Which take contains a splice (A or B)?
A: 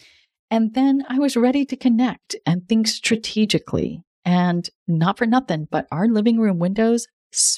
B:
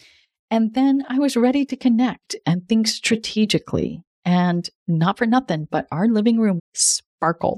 B